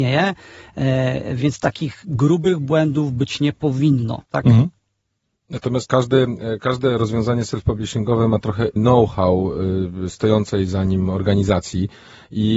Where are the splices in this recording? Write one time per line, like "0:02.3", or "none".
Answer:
0:04.3
0:05.9
0:08.8